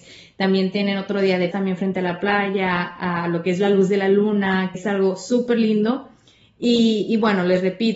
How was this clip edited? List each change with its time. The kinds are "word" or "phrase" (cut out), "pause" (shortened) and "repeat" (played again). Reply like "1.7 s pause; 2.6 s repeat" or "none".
1.5 s word; 4.7 s word